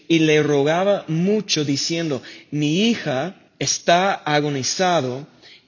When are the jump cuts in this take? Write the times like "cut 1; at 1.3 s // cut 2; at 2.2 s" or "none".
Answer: cut 1; at 3.5 s